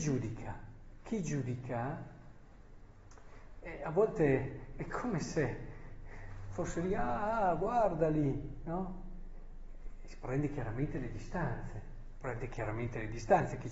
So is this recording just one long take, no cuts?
yes; 0 cuts

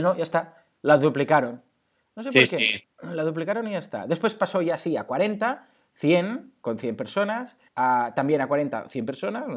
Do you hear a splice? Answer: yes; 1 cut; at 7.7 s

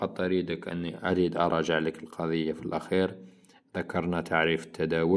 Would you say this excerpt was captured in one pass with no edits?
yes; 0 cuts

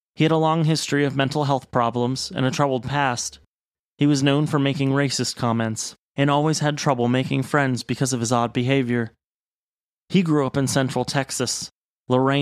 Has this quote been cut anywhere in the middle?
no; 0 cuts

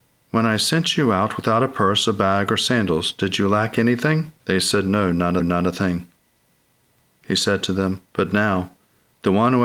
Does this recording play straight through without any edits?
no; 3 cuts; at 4.4 s, 5.4 s, 8.0 s

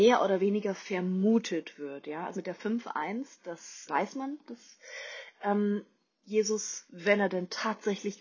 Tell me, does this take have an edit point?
yes; 4 cuts; at 2.3 s, 3.9 s, 4.4 s, 6.9 s

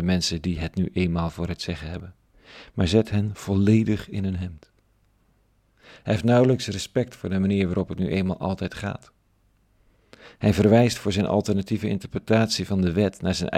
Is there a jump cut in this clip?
no; 0 cuts

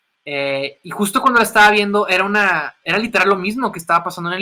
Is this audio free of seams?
yes; 0 cuts

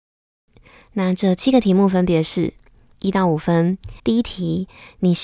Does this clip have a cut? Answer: yes; 1 cut; at 4.0 s

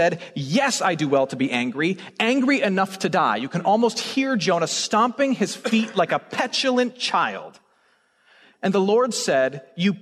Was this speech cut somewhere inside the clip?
no; 0 cuts

